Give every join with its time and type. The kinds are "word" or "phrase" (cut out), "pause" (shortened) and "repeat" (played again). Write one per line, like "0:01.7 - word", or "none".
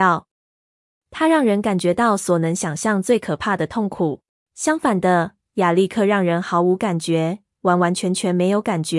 0:04.3 - pause